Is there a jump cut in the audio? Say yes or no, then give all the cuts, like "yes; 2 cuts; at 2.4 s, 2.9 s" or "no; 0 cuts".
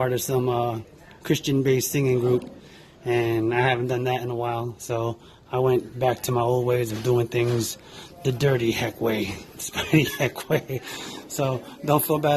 no; 0 cuts